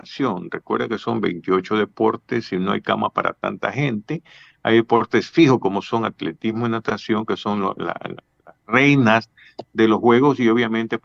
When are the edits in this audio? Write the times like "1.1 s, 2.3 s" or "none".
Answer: none